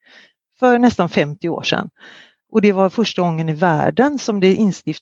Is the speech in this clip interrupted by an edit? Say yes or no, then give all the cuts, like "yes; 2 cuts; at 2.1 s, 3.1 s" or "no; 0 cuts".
no; 0 cuts